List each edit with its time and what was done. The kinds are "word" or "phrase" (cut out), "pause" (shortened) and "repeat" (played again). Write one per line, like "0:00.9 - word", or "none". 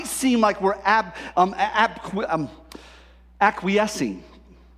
0:02.3 - word